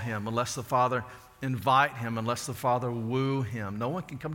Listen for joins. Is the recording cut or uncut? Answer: uncut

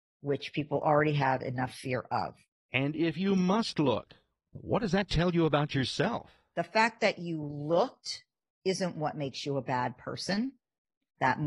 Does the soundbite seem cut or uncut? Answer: uncut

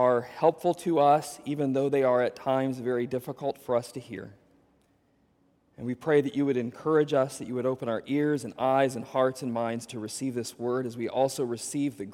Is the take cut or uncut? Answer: uncut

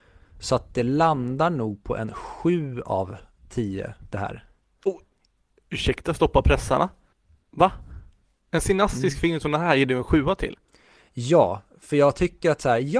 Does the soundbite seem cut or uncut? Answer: uncut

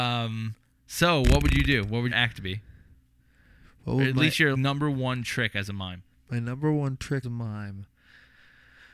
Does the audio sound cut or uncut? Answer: cut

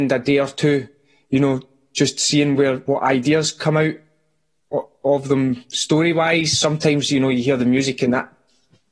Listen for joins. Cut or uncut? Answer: uncut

